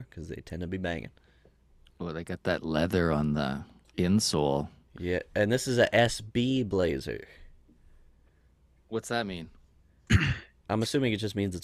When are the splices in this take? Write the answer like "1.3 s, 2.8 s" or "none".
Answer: none